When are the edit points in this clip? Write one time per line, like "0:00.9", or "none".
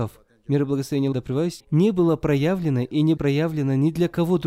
0:01.1
0:01.6
0:03.2